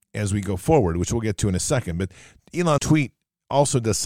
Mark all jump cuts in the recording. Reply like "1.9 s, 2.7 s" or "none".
2.8 s